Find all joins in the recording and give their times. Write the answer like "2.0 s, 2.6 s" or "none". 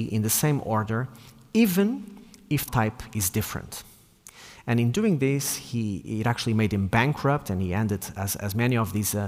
2.7 s